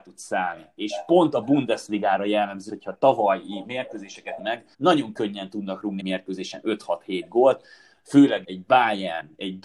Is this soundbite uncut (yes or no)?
no